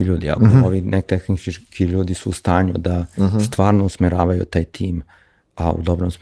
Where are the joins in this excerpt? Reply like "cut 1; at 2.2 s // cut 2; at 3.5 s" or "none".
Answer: none